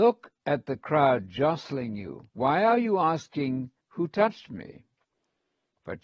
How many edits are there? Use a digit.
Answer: 2